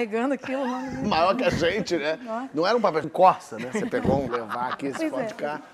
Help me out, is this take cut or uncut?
cut